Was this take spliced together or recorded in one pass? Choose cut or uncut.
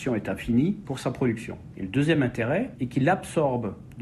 uncut